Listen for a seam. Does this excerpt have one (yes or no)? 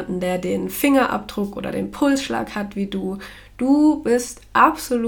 no